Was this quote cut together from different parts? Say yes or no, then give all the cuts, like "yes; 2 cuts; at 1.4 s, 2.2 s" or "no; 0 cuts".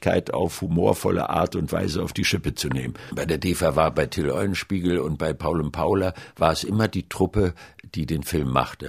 no; 0 cuts